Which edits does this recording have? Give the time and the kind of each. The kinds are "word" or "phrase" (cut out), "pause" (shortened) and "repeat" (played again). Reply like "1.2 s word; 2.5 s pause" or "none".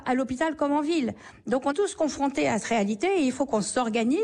1.7 s word; 2.6 s word